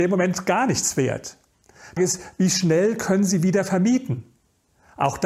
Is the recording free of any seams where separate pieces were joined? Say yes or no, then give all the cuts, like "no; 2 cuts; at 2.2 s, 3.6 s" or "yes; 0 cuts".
no; 1 cut; at 2.0 s